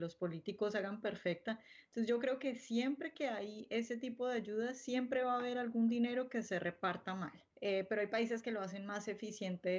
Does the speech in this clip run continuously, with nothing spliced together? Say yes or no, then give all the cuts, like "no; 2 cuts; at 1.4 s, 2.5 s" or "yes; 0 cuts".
no; 1 cut; at 7.5 s